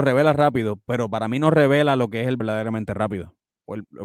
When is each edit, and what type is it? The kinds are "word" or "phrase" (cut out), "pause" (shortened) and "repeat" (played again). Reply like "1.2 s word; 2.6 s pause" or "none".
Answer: 2.4 s word